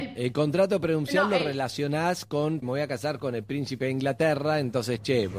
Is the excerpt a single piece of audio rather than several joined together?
no; 1 cut; at 2.6 s

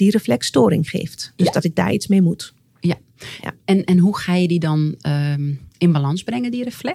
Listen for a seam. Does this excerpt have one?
no; 0 cuts

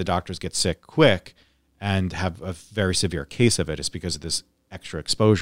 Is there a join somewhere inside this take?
no; 0 cuts

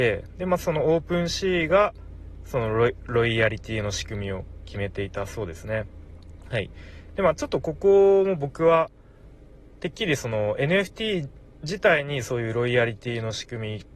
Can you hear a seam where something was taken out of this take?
no; 0 cuts

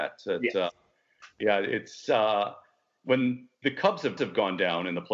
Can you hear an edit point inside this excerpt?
yes; 2 cuts; at 3.5 s, 4.2 s

